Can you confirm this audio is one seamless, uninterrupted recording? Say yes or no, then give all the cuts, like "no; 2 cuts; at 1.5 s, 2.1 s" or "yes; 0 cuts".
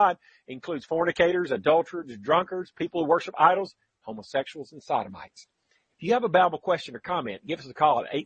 yes; 0 cuts